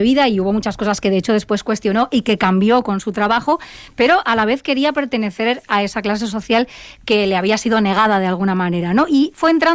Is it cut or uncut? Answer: uncut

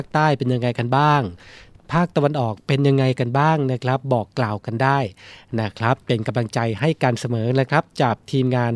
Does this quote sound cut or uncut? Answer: cut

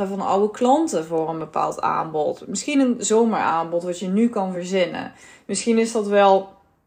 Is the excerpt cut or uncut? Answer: uncut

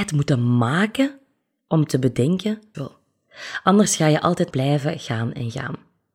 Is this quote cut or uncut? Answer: cut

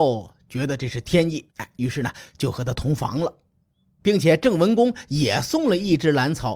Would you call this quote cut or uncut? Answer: cut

